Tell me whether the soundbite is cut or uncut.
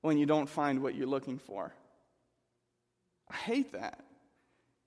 uncut